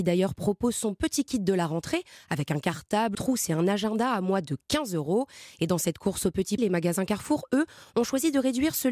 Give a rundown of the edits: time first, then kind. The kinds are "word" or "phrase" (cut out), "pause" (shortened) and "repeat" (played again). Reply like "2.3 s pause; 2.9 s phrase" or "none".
3.1 s word; 6.6 s word